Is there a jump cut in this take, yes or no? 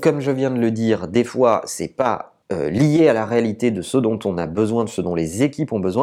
yes